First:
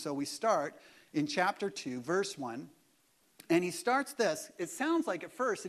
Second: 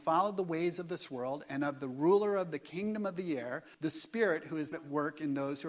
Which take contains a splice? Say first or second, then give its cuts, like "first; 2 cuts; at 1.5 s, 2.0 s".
second; 2 cuts; at 3.7 s, 4.7 s